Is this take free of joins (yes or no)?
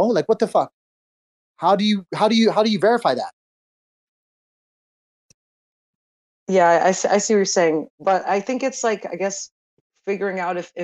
no